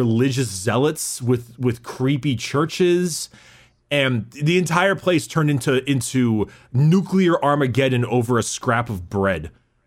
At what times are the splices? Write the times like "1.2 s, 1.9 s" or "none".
none